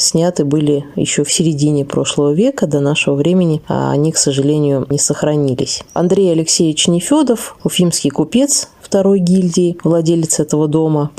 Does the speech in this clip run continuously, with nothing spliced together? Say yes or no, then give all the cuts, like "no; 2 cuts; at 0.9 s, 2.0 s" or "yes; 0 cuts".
yes; 0 cuts